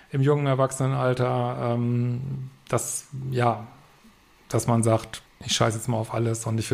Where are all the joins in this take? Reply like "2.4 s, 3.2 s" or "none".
5.3 s